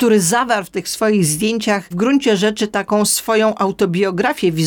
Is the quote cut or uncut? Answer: uncut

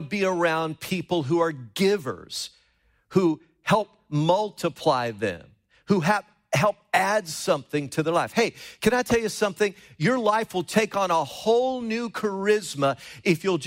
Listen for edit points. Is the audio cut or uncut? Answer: uncut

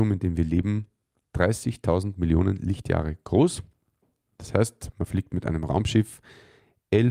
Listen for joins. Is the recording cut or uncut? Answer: uncut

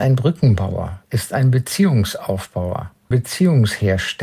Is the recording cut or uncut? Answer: cut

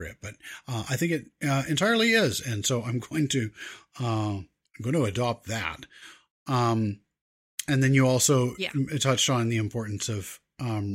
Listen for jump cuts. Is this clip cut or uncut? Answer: uncut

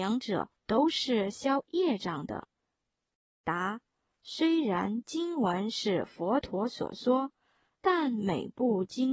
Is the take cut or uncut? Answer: uncut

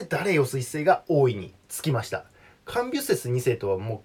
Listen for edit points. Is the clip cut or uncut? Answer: uncut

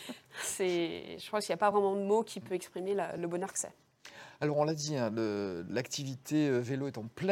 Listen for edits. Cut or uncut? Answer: uncut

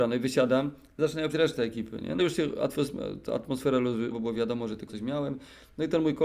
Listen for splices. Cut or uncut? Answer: cut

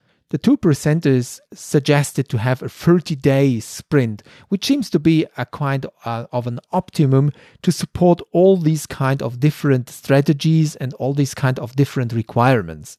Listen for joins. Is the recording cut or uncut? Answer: uncut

